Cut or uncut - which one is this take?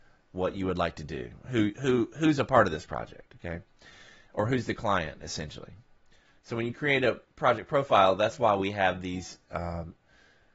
uncut